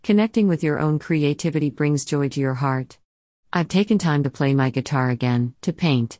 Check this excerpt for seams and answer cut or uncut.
uncut